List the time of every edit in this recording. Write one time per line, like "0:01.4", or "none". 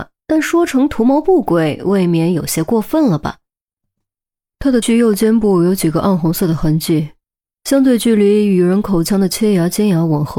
0:04.8